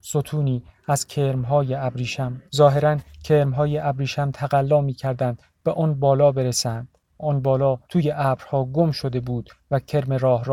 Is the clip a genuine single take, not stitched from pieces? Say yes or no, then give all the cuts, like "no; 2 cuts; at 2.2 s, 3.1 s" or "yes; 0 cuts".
no; 3 cuts; at 2.5 s, 7.2 s, 7.8 s